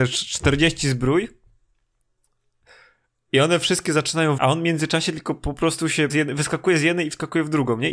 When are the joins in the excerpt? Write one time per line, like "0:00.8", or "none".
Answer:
0:04.4
0:06.1